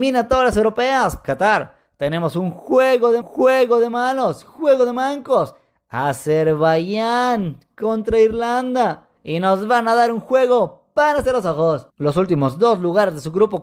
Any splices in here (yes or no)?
yes